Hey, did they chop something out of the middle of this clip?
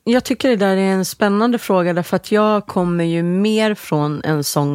no; 0 cuts

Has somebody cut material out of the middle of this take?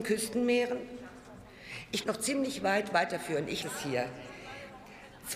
yes; 2 cuts; at 2.0 s, 3.6 s

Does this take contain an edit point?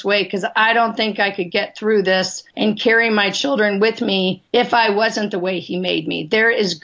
yes; 2 cuts; at 2.5 s, 4.5 s

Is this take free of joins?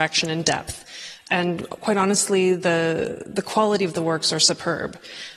yes; 0 cuts

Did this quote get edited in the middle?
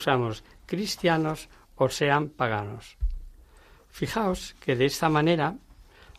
no; 0 cuts

